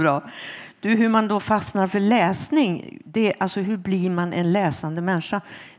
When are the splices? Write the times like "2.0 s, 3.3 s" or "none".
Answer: none